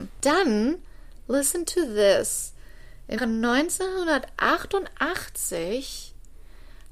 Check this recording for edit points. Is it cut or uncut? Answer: cut